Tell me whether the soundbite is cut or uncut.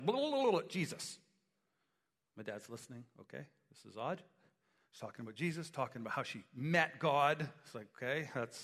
uncut